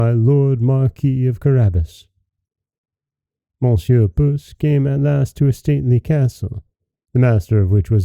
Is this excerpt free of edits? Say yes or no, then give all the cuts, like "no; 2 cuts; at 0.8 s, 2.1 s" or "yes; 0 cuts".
yes; 0 cuts